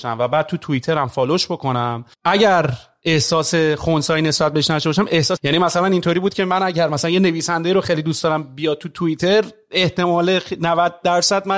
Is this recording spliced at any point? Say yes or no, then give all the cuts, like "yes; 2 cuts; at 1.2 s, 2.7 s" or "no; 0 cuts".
yes; 2 cuts; at 2.1 s, 5.4 s